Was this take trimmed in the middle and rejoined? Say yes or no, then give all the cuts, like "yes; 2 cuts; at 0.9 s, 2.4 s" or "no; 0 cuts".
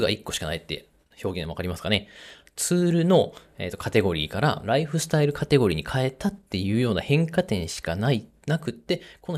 no; 0 cuts